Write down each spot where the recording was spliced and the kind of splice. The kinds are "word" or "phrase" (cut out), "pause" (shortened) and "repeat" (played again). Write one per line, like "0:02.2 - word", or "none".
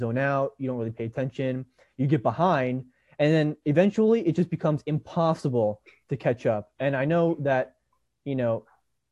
none